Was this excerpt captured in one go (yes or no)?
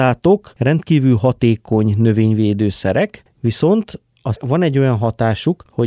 no